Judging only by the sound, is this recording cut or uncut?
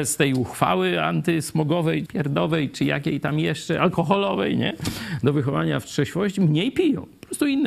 cut